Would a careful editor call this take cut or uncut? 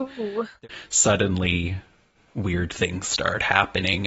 uncut